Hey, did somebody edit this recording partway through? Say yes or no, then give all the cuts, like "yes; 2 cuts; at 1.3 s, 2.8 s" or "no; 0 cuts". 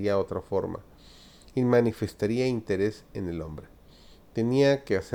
no; 0 cuts